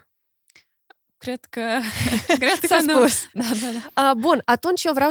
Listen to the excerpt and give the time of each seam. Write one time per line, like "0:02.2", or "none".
none